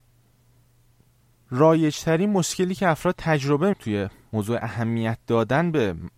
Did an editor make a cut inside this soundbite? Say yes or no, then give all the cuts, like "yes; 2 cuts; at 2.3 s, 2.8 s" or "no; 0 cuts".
yes; 1 cut; at 3.7 s